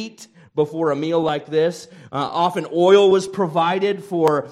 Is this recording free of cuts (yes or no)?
yes